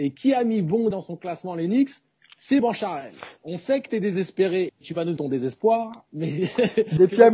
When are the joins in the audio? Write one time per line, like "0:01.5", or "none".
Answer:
0:00.9
0:02.6
0:03.4
0:04.7
0:05.2